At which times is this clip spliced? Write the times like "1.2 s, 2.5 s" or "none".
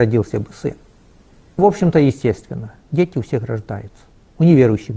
1.6 s